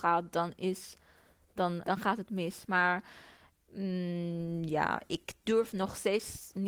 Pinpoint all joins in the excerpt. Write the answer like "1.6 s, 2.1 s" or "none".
1.8 s